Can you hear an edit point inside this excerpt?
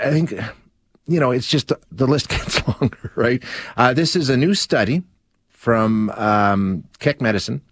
no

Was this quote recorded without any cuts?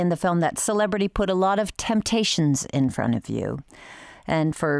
yes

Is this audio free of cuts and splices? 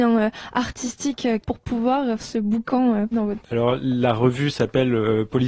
no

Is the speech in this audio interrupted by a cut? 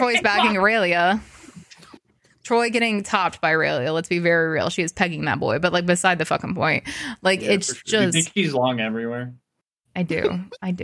no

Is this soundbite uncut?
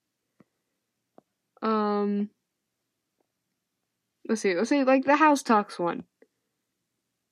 yes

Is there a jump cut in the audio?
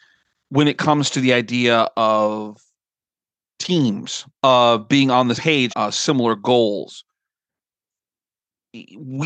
yes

